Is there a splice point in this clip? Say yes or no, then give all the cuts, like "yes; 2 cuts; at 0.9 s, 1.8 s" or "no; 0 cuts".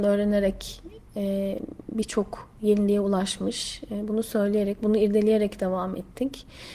no; 0 cuts